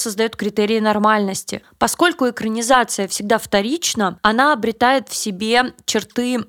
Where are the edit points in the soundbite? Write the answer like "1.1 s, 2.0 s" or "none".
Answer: none